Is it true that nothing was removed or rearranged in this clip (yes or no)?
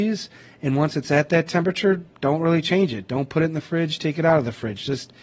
yes